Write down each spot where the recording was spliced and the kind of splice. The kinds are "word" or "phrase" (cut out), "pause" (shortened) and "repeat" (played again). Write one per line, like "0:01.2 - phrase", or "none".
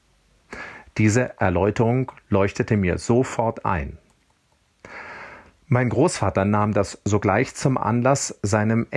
none